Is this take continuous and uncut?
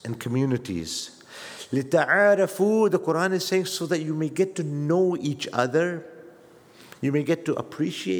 yes; 0 cuts

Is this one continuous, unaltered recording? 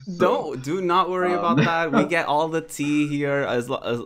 yes; 0 cuts

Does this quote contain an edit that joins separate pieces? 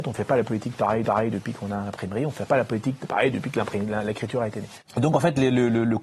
yes; 1 cut; at 1.0 s

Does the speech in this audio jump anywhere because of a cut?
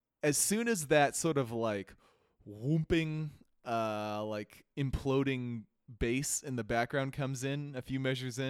no; 0 cuts

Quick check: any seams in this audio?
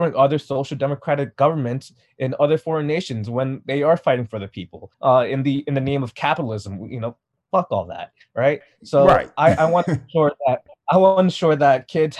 yes; 1 cut; at 4.9 s

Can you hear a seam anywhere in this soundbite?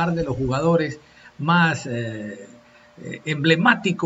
no; 0 cuts

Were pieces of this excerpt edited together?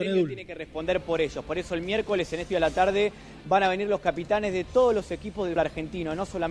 yes; 2 cuts; at 2.5 s, 5.6 s

